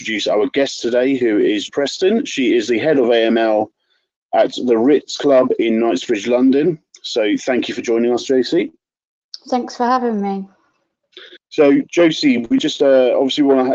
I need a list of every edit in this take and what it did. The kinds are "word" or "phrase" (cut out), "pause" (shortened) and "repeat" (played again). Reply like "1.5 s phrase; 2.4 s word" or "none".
1.7 s word; 11.4 s pause